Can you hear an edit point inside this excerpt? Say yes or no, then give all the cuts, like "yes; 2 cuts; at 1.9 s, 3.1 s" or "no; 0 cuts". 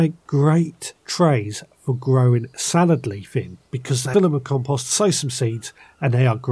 yes; 2 cuts; at 1.0 s, 4.1 s